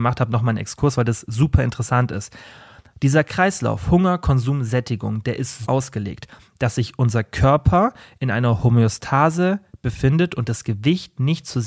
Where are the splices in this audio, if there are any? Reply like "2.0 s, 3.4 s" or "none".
5.6 s